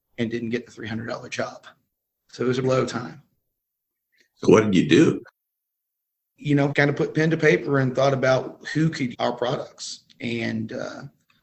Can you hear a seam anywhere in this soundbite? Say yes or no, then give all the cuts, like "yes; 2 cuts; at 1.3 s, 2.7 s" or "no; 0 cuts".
yes; 3 cuts; at 2.6 s, 6.7 s, 9.1 s